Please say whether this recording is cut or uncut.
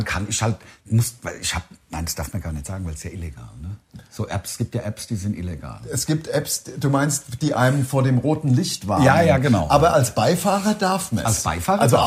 cut